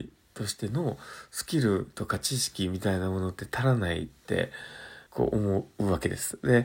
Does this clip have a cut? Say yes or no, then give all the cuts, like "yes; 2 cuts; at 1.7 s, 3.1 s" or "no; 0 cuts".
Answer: yes; 1 cut; at 5.1 s